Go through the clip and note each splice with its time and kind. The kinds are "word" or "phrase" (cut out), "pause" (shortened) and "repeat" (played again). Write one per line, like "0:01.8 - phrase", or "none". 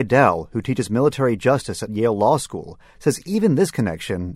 none